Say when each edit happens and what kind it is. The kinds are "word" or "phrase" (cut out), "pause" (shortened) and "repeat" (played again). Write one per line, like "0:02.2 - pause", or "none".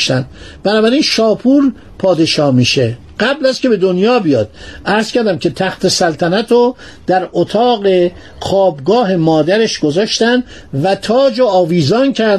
none